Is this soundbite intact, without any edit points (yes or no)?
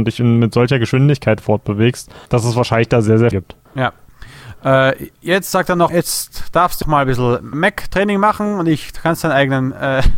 no